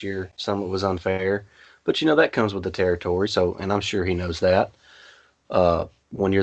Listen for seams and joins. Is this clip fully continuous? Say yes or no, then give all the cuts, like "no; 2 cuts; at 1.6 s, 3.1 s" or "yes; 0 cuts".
yes; 0 cuts